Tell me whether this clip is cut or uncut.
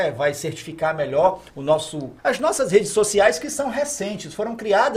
cut